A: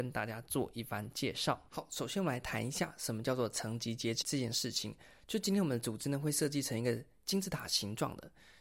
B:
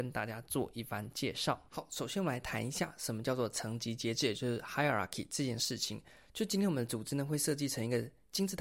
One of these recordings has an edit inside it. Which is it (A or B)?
A